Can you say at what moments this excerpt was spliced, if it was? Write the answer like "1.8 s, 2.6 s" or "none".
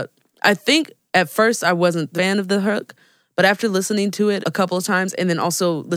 1.1 s, 2.2 s, 4.4 s